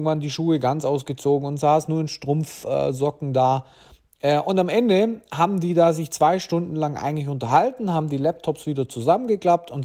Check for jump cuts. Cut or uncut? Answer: uncut